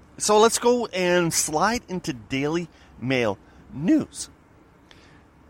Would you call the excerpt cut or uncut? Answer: uncut